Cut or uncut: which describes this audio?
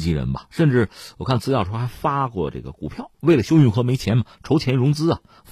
cut